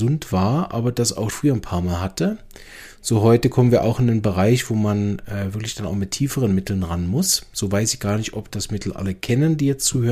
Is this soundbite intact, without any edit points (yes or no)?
no